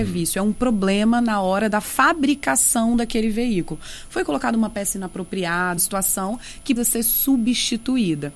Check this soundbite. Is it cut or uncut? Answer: cut